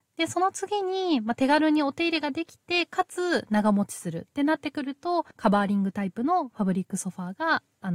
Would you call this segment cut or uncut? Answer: cut